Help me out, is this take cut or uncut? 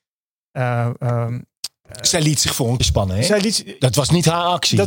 cut